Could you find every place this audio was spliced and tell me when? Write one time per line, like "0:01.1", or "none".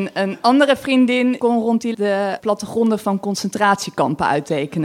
0:01.4
0:01.9
0:02.4